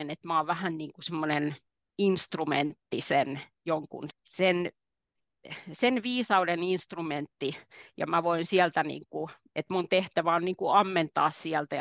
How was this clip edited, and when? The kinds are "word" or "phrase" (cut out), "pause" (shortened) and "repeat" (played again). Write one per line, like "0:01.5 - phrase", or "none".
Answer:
0:04.1 - word